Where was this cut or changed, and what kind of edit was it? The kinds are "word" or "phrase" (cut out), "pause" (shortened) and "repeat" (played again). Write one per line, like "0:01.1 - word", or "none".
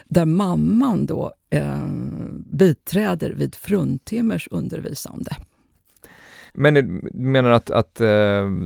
0:06.5 - pause